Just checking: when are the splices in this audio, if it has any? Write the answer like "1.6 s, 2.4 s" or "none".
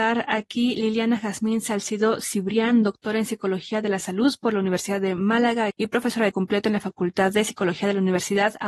5.7 s, 6.3 s